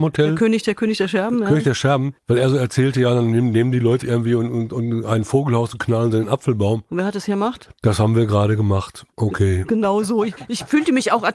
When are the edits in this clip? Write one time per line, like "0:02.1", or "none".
0:02.2
0:04.0
0:09.1